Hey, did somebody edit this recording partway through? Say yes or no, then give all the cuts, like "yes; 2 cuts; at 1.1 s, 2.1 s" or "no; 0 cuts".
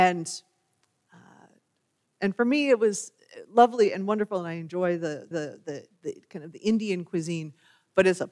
yes; 1 cut; at 5.3 s